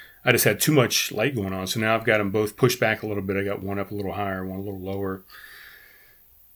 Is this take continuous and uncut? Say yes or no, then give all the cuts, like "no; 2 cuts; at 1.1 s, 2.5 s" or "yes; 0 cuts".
yes; 0 cuts